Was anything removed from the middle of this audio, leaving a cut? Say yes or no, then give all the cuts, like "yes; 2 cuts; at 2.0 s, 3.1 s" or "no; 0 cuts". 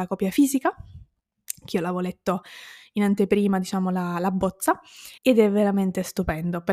yes; 1 cut; at 5.2 s